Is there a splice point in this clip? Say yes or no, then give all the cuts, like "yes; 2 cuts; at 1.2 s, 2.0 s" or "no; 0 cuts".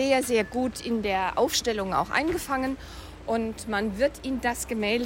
no; 0 cuts